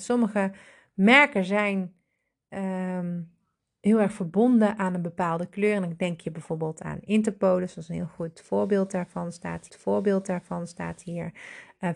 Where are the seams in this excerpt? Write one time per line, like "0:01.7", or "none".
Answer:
0:09.7

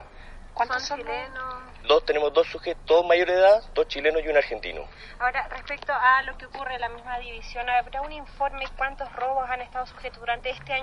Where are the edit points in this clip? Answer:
0:01.8

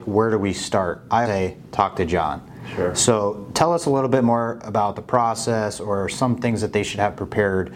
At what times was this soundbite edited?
0:01.2

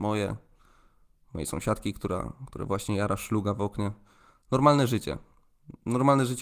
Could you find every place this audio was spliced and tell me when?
none

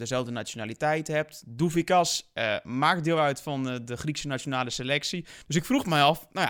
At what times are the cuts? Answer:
0:05.4

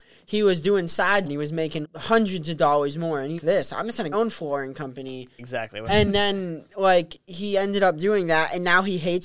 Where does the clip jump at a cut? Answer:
0:01.2
0:01.8
0:03.4
0:04.1
0:05.4
0:05.9

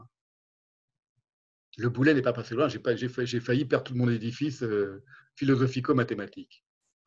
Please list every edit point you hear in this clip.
0:05.2

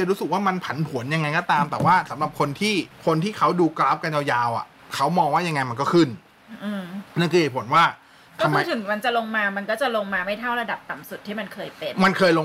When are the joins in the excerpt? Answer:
0:02.9
0:04.8
0:07.1

